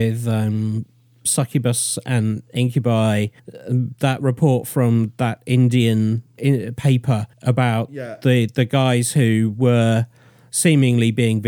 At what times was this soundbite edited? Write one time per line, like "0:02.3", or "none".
0:03.4
0:06.4
0:07.3